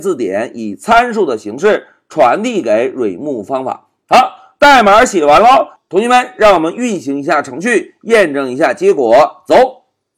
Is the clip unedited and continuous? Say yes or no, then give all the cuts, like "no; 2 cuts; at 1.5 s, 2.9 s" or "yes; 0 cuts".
yes; 0 cuts